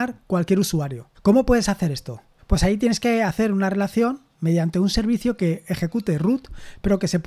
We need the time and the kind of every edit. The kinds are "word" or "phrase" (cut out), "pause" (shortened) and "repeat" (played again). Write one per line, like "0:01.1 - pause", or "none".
0:01.1 - pause
0:02.4 - pause